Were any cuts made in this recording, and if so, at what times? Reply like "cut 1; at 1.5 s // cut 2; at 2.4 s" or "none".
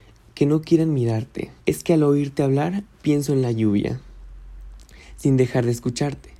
cut 1; at 1.6 s